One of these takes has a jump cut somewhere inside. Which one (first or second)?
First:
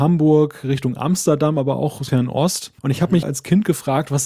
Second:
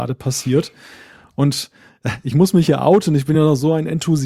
first